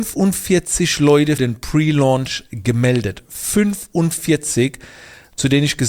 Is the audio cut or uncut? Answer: cut